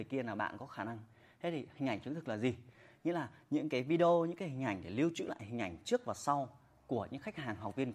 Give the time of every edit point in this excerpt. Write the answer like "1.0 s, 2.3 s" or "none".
none